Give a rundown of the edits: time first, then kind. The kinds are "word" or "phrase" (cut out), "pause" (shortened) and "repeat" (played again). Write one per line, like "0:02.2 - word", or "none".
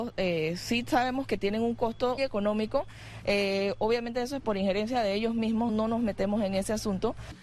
0:02.2 - word
0:05.7 - word